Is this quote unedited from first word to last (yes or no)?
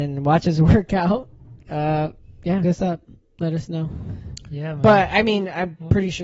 no